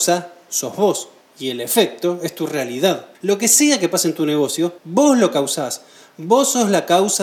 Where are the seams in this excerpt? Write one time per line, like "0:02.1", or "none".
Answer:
0:01.2
0:03.1
0:04.8